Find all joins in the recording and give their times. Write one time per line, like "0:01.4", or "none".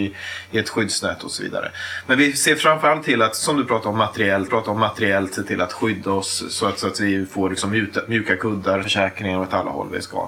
0:04.5
0:08.8